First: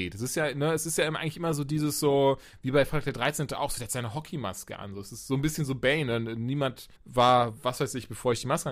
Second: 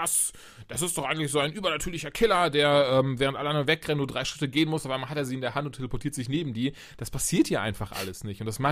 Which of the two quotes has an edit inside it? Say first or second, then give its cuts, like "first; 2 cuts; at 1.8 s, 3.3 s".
first; 1 cut; at 6.9 s